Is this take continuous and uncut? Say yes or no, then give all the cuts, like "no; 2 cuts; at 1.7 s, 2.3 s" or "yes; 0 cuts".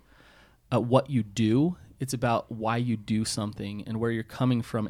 yes; 0 cuts